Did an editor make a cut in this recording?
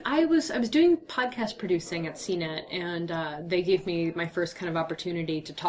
no; 0 cuts

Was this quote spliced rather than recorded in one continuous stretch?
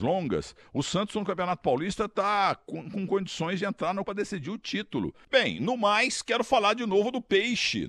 yes; 1 cut; at 4.1 s

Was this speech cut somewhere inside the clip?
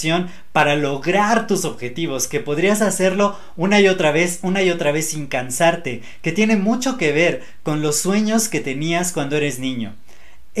no; 0 cuts

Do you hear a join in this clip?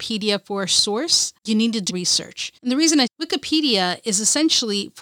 yes; 4 cuts; at 1.4 s, 1.9 s, 2.6 s, 3.1 s

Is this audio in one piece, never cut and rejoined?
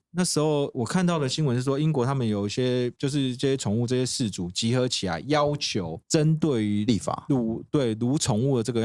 no; 1 cut; at 6.0 s

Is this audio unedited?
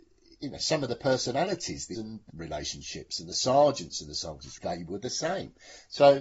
no; 3 cuts; at 1.9 s, 2.3 s, 4.6 s

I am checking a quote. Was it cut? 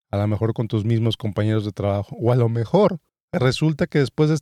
yes; 1 cut; at 3.1 s

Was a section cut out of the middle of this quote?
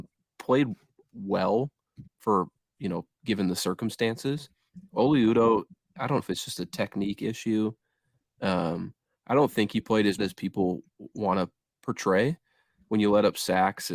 yes; 3 cuts; at 2.1 s, 6.2 s, 10.2 s

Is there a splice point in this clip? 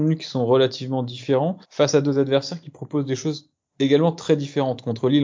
yes; 1 cut; at 1.6 s

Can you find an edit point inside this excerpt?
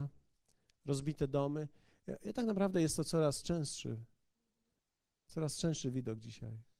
yes; 1 cut; at 4.8 s

